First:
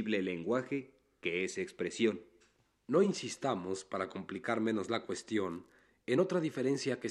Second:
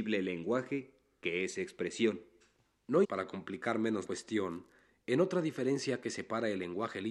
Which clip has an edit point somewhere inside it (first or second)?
second